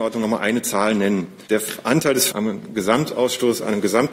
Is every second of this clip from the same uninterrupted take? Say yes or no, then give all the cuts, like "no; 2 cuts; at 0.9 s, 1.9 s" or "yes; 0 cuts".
no; 2 cuts; at 1.4 s, 2.3 s